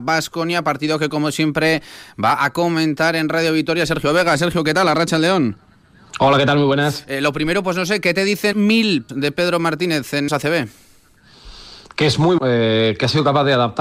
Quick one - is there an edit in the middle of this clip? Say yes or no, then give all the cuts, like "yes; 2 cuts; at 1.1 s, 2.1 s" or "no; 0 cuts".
yes; 4 cuts; at 8.5 s, 9.1 s, 10.3 s, 12.4 s